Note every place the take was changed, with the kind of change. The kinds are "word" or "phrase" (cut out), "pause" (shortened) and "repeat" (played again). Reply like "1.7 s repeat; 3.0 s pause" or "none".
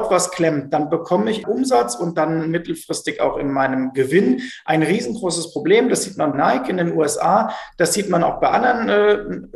1.4 s phrase; 6.3 s word